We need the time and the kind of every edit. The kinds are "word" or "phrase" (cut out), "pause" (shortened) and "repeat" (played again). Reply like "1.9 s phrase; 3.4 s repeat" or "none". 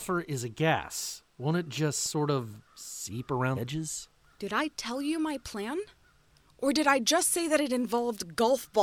2.7 s pause; 3.6 s word